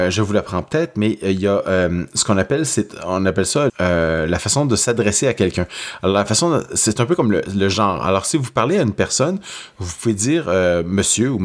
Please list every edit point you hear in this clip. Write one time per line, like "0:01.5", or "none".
0:03.7